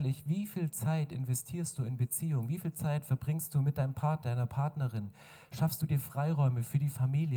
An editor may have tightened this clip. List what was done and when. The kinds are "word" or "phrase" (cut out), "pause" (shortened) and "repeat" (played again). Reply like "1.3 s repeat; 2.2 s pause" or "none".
4.2 s word